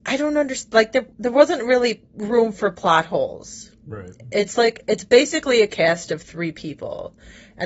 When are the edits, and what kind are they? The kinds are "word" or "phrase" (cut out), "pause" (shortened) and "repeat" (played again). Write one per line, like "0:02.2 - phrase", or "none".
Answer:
0:01.1 - pause